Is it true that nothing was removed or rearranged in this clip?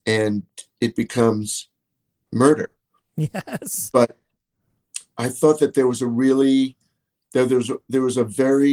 yes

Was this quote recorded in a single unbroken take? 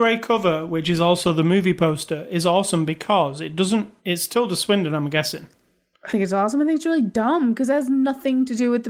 no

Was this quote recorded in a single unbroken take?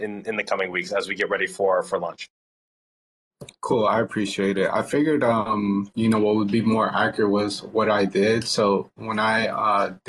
no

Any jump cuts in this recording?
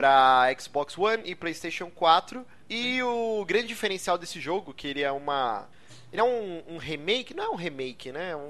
no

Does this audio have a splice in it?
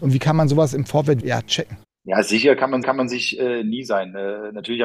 yes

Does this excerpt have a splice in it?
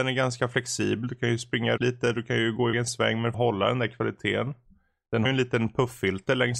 yes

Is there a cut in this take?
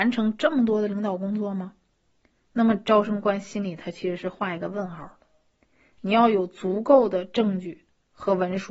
no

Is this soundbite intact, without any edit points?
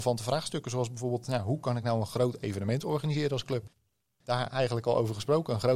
yes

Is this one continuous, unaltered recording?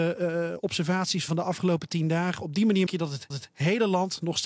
no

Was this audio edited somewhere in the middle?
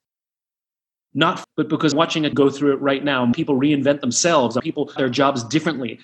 yes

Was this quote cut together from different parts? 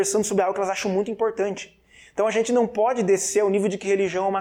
no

